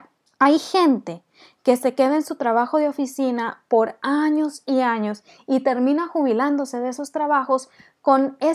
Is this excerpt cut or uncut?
uncut